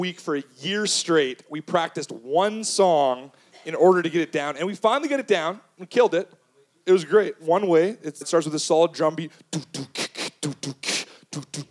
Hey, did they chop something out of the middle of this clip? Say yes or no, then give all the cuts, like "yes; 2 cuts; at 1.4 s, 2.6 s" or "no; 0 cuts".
yes; 1 cut; at 8.2 s